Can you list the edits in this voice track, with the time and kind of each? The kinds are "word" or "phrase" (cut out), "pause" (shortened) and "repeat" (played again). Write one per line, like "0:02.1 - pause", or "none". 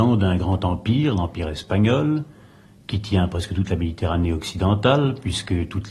none